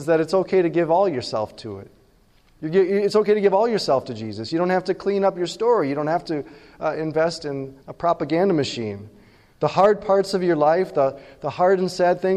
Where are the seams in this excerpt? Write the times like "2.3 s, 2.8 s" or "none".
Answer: 7.8 s